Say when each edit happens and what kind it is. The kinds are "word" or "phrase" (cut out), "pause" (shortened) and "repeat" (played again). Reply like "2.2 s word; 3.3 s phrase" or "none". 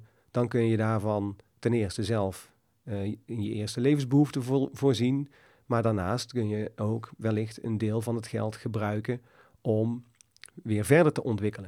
none

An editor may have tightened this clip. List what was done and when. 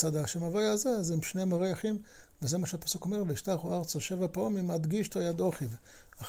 none

